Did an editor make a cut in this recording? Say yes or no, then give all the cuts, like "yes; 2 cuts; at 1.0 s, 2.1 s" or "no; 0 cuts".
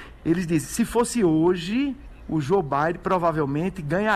no; 0 cuts